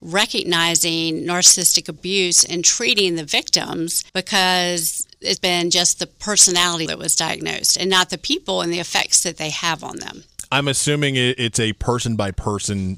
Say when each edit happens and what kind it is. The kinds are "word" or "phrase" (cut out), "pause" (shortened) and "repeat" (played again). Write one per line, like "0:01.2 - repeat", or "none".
0:04.1 - pause
0:05.4 - word
0:06.9 - word

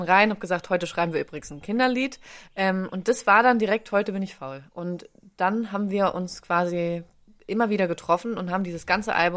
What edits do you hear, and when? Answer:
none

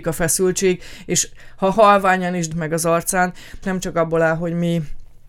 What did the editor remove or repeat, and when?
0:02.5 - phrase
0:03.6 - phrase

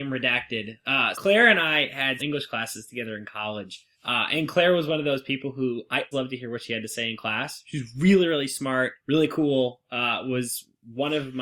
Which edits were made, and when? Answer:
0:01.1 - word
0:02.2 - word
0:03.9 - pause
0:06.1 - word
0:09.0 - pause

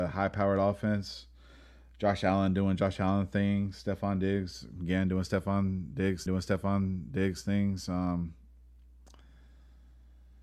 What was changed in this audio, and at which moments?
0:06.3 - repeat

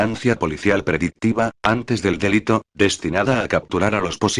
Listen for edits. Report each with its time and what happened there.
none

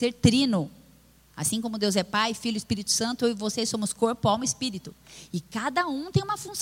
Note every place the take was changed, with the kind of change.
none

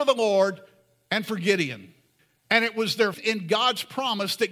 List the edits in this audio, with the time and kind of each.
0:02.2 - pause
0:03.1 - word

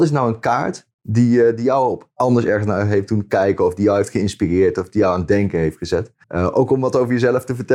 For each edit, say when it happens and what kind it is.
0:06.2 - pause

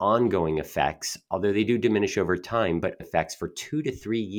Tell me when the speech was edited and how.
0:03.0 - word

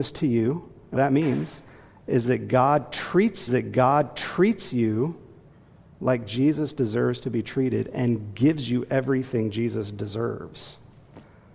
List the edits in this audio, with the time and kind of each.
0:01.0 - word
0:03.5 - repeat

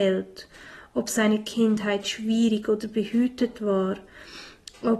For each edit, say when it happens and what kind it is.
none

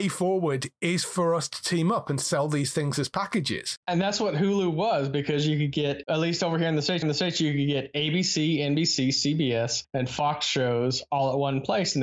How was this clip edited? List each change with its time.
0:07.0 - repeat

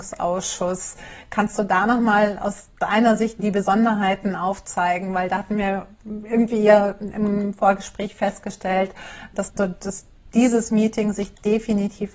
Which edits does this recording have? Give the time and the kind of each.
0:03.4 - word
0:09.5 - word

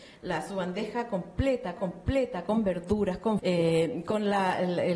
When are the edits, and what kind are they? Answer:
0:01.8 - repeat
0:03.4 - word

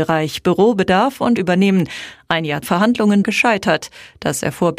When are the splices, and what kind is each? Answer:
0:01.4 - phrase
0:02.6 - phrase
0:03.2 - word

